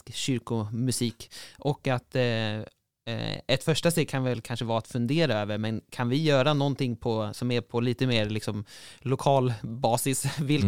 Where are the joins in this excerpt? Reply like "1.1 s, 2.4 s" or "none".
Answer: none